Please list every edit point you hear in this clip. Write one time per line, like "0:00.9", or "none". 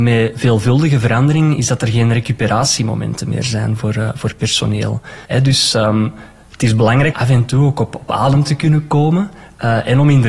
0:05.2
0:07.1